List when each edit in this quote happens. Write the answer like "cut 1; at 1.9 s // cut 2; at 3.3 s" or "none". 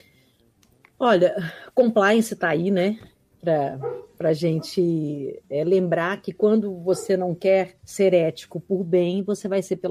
cut 1; at 7.8 s